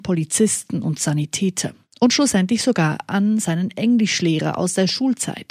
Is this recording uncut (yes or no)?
yes